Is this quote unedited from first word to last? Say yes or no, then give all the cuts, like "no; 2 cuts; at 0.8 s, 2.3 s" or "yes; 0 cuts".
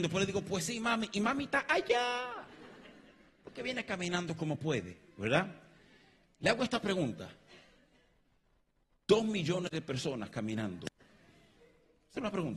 yes; 0 cuts